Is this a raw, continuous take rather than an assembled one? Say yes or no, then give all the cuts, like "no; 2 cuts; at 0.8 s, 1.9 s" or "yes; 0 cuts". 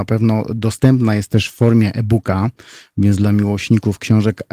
yes; 0 cuts